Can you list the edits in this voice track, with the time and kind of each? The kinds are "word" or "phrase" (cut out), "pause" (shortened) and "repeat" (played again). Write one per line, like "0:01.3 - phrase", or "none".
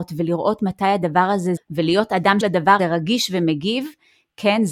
0:01.6 - phrase
0:02.4 - word
0:02.8 - word